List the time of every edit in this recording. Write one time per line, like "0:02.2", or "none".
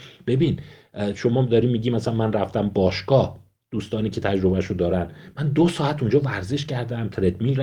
none